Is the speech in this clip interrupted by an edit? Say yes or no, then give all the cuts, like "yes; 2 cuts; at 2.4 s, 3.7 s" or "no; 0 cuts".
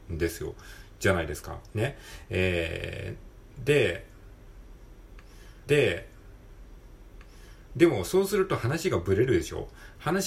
yes; 1 cut; at 5.7 s